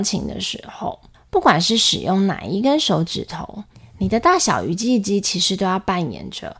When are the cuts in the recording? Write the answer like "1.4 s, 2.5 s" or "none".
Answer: 1.1 s, 3.7 s